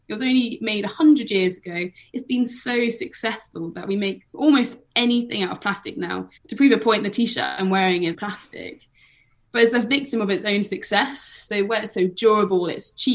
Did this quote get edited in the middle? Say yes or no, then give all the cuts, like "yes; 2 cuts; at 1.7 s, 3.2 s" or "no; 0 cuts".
yes; 3 cuts; at 4.3 s, 6.4 s, 8.1 s